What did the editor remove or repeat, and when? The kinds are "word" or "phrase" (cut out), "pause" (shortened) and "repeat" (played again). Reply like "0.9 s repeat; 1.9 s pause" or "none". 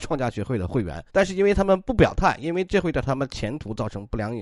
1.1 s pause